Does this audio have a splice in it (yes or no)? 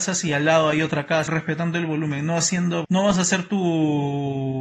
yes